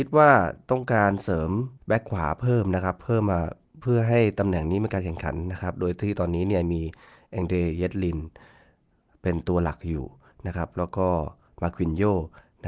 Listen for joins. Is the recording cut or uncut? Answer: cut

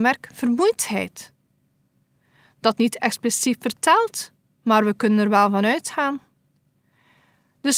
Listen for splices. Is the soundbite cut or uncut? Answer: cut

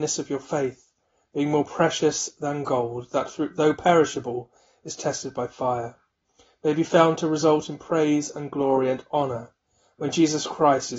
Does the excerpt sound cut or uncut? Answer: uncut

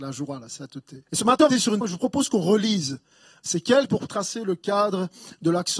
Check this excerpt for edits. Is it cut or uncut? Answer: cut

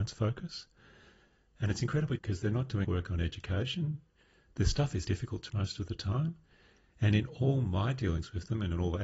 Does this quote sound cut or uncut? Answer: cut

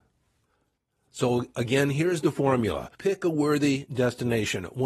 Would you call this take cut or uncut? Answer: cut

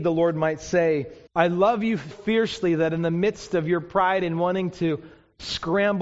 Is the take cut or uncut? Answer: cut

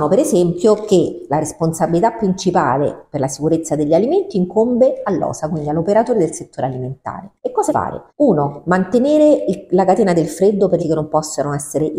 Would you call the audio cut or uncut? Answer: cut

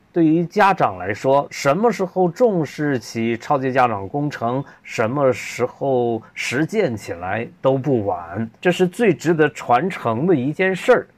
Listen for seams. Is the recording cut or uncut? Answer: cut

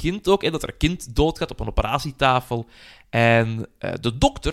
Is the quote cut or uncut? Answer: uncut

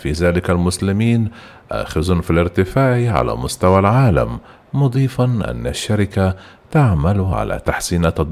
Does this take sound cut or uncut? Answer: uncut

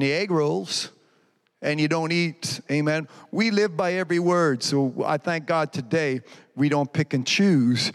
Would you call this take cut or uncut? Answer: uncut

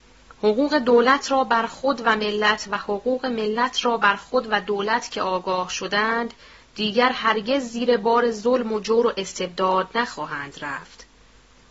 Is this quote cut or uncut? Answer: uncut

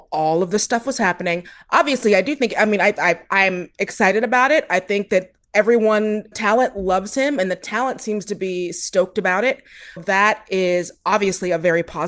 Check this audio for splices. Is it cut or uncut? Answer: cut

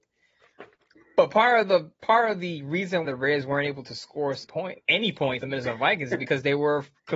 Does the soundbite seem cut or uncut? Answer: cut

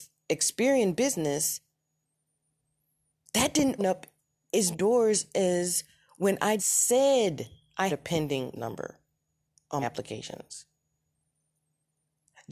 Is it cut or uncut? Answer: cut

